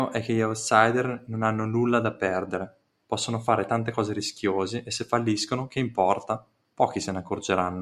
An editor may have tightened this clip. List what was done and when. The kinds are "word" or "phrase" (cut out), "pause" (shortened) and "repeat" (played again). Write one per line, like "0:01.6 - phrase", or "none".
0:02.9 - pause

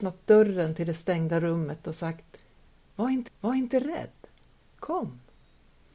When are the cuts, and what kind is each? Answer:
0:03.3 - repeat

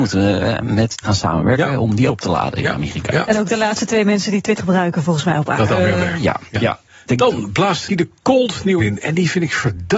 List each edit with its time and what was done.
0:01.0 - word
0:02.1 - word
0:04.6 - word
0:05.7 - word
0:07.9 - word
0:08.8 - word

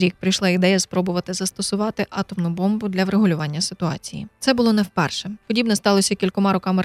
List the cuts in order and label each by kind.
none

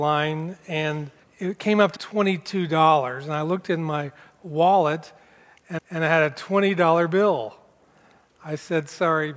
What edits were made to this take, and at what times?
0:01.2 - pause
0:02.0 - word
0:05.8 - repeat

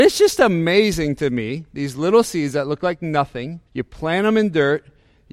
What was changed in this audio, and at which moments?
0:03.7 - pause

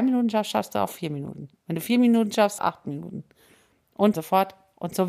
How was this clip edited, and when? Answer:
0:01.5 - pause
0:02.6 - phrase
0:04.1 - phrase

